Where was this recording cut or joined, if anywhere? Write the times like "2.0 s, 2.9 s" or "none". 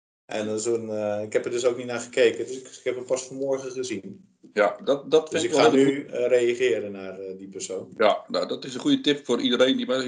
none